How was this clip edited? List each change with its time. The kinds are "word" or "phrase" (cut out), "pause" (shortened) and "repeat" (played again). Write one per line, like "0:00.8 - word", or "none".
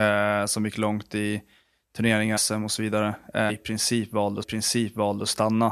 0:02.4 - word
0:03.5 - phrase
0:04.4 - repeat